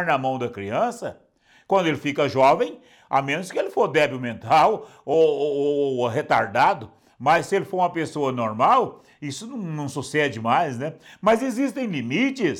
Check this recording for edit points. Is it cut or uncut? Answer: uncut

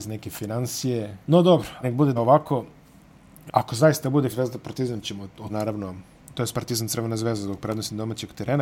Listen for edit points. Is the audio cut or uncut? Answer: cut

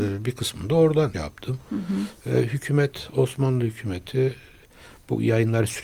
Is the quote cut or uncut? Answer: cut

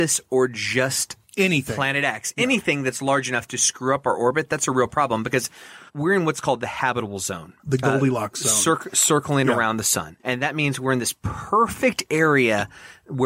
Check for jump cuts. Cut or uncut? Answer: cut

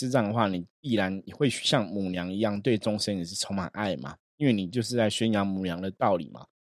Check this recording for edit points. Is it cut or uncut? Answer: cut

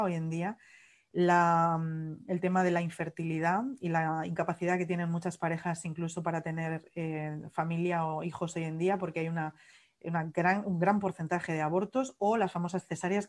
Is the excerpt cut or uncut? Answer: uncut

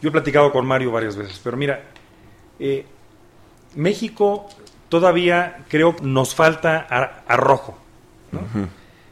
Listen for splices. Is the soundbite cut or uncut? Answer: cut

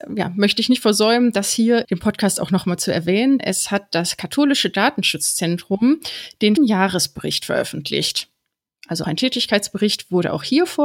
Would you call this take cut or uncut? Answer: cut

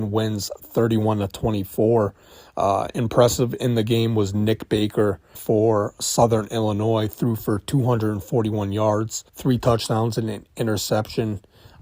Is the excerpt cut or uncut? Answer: cut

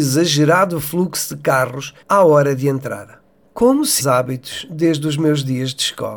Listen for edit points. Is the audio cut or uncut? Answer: cut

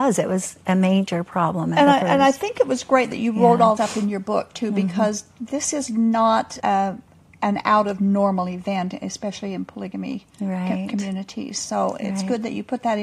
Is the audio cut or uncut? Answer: cut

